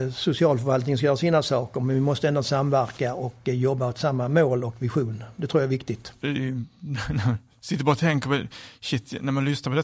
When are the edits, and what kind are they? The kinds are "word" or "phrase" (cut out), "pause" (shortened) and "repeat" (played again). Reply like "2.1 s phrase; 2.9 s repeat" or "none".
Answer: none